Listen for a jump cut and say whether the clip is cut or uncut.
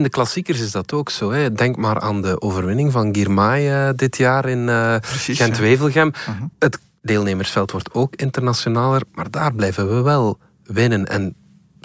cut